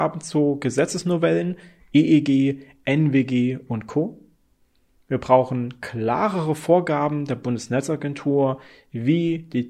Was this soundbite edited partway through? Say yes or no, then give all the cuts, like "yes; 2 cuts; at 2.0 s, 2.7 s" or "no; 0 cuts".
no; 0 cuts